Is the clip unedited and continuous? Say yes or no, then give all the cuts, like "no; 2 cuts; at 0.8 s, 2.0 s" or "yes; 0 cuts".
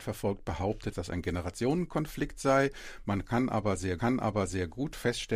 no; 2 cuts; at 0.9 s, 4.0 s